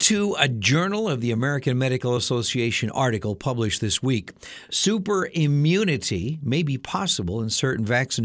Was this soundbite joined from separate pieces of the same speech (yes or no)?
no